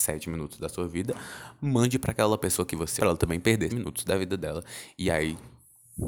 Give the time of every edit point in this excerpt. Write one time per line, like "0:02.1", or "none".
0:03.0
0:03.7